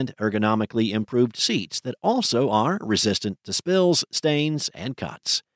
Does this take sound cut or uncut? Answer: uncut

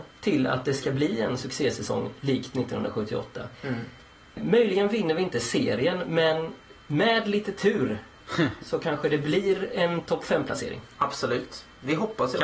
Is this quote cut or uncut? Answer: uncut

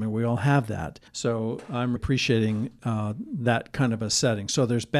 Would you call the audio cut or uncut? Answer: cut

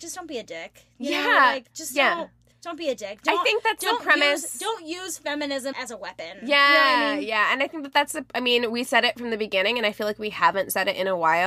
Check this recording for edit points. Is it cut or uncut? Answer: cut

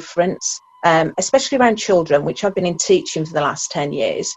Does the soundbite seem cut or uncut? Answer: uncut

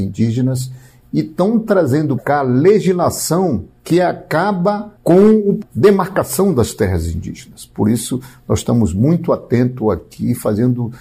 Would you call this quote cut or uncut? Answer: cut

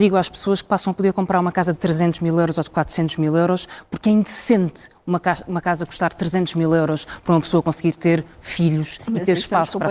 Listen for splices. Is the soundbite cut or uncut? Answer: uncut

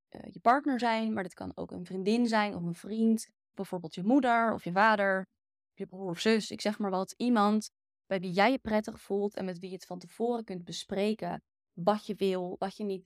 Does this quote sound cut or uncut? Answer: cut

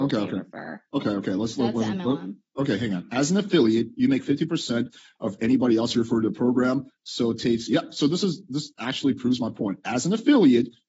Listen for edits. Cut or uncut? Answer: uncut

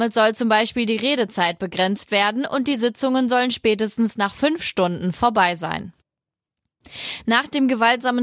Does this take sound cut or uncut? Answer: uncut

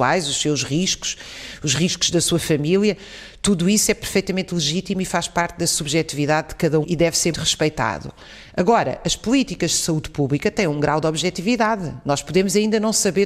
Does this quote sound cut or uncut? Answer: cut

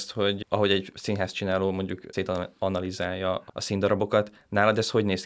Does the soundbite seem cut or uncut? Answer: uncut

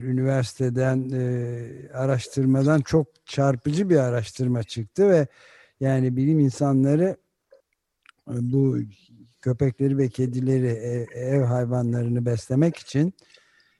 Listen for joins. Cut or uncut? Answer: uncut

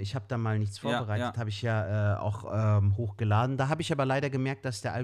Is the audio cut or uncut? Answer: uncut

